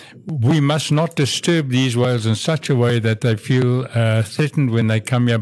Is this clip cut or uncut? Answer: uncut